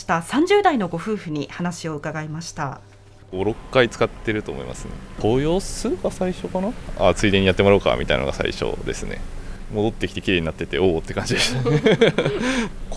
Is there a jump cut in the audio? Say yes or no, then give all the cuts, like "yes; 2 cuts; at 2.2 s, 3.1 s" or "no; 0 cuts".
no; 0 cuts